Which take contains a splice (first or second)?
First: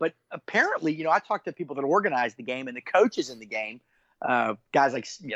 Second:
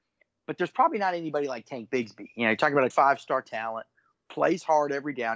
second